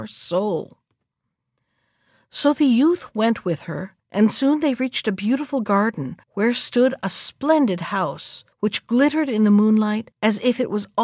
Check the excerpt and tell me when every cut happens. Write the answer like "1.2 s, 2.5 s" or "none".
4.0 s, 6.2 s, 8.5 s, 10.1 s